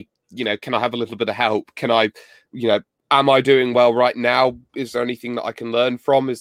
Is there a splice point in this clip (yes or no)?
no